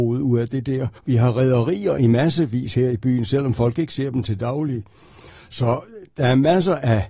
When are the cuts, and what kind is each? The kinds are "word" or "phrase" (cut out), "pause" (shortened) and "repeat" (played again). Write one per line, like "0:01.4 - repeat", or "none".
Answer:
0:01.0 - pause